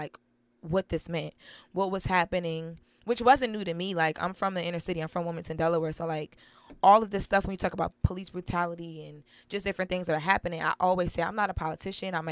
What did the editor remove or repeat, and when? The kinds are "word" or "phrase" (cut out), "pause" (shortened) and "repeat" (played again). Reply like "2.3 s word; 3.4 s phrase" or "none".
none